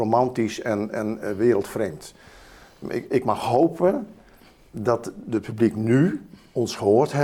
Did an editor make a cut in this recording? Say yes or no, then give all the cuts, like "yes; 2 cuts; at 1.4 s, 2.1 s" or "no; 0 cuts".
no; 0 cuts